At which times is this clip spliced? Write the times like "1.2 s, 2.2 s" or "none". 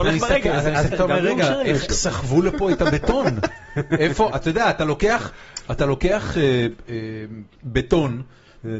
0.9 s, 1.9 s, 7.6 s